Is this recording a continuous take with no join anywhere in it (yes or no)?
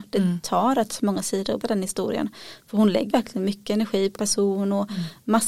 no